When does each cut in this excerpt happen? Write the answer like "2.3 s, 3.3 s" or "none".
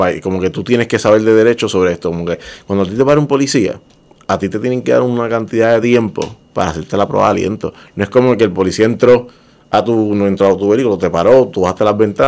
none